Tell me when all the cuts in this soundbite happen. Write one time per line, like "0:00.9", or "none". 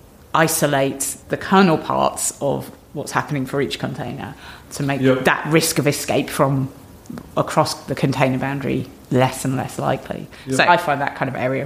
0:01.2
0:04.7
0:09.0
0:10.7

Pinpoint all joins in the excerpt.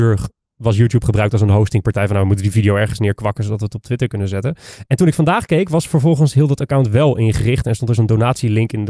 0:08.0

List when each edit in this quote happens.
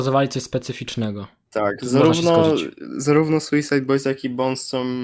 none

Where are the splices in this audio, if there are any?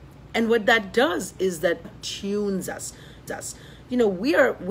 0:01.8
0:03.3

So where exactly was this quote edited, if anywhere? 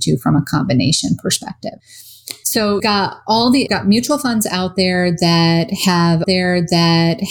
0:02.8
0:03.7
0:06.2

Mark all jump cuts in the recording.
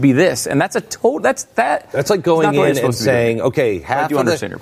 none

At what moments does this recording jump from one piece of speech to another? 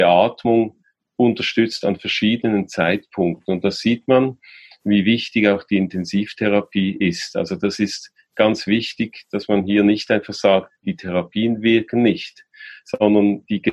none

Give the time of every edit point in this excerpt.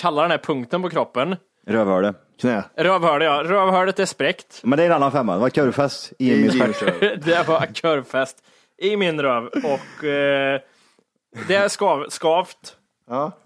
none

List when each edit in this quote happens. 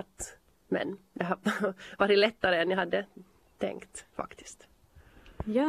none

